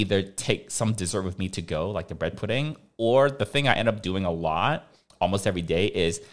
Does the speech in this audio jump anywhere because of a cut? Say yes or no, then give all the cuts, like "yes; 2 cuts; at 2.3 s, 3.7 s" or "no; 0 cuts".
no; 0 cuts